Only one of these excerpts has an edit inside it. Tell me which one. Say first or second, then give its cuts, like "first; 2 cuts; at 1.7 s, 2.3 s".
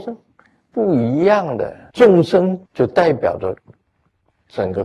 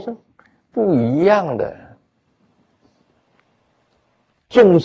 first; 2 cuts; at 1.9 s, 2.7 s